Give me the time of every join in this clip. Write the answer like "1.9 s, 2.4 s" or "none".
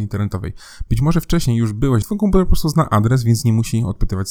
2.0 s